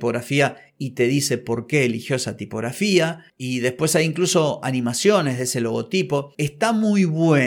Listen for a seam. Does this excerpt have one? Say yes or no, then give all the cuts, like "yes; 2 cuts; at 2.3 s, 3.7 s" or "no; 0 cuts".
no; 0 cuts